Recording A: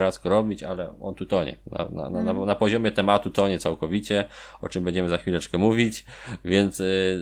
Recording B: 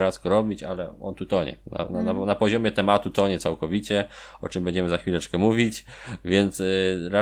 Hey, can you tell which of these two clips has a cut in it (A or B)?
B